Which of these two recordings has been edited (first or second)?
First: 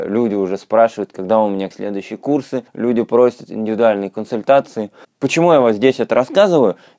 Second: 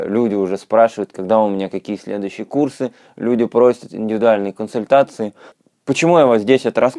first